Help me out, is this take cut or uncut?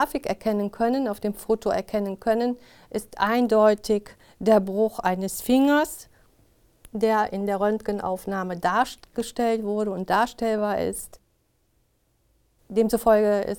uncut